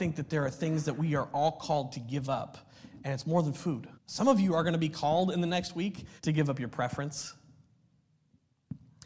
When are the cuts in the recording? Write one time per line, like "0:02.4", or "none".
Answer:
0:03.9
0:06.2